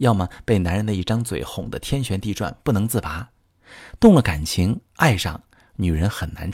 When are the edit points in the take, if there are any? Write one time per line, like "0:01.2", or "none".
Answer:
none